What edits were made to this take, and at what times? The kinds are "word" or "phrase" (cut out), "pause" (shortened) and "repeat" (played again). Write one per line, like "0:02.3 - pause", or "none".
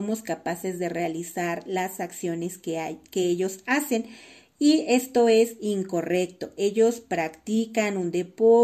none